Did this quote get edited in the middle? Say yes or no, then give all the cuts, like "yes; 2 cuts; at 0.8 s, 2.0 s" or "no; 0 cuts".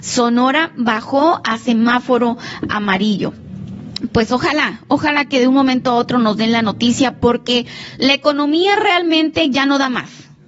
no; 0 cuts